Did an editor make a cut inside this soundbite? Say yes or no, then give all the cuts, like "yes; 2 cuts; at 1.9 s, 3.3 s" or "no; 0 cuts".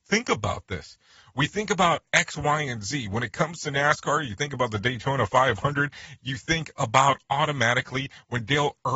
no; 0 cuts